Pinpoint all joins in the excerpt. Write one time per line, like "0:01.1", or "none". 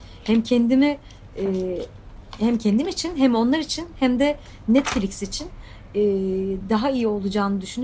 none